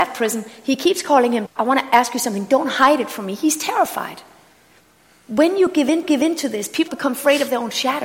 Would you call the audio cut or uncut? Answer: cut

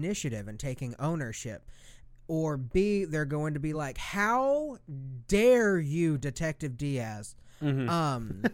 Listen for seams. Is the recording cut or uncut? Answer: uncut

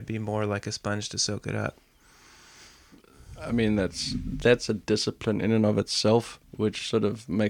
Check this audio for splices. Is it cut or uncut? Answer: cut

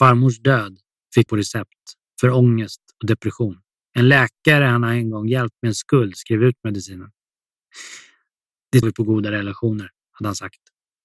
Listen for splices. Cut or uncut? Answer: cut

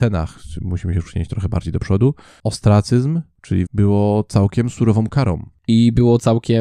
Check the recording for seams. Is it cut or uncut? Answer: cut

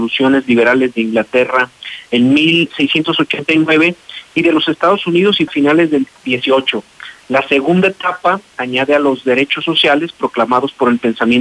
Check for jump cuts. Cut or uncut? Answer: cut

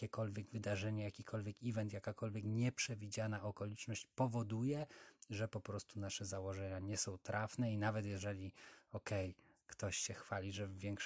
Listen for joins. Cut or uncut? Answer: uncut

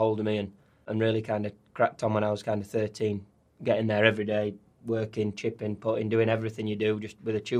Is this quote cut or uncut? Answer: uncut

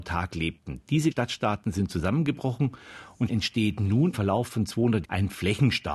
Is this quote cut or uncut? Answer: cut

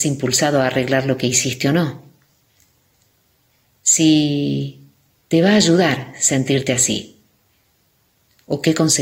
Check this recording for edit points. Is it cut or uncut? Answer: uncut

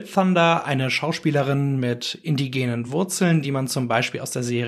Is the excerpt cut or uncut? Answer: uncut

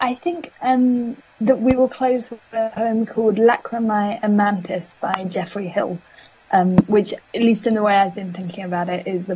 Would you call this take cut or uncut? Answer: cut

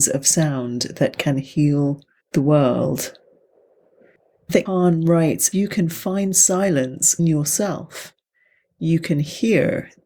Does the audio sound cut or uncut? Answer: cut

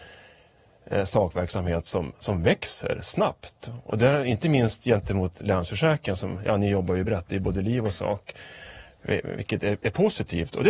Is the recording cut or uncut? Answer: uncut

